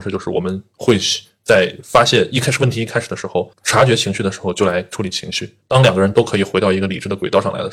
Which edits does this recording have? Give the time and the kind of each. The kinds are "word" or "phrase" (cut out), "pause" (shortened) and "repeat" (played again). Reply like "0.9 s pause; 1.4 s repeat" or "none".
3.5 s word; 5.6 s word